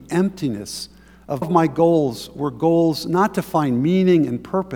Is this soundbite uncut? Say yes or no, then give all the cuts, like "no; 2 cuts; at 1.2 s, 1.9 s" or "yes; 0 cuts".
no; 1 cut; at 1.4 s